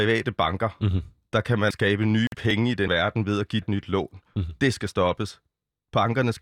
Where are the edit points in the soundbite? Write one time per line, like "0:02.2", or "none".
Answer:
0:01.7
0:02.9
0:03.6